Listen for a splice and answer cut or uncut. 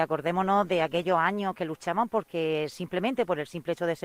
uncut